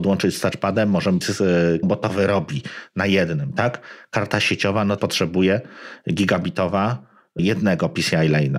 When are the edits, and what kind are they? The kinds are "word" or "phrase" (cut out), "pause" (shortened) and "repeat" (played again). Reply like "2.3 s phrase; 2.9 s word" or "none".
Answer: 1.2 s word; 1.8 s word; 5.0 s word